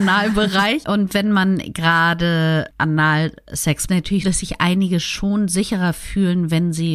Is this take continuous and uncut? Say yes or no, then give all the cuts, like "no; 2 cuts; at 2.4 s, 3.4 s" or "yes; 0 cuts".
no; 2 cuts; at 3.9 s, 4.2 s